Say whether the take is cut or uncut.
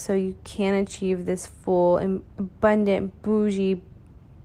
cut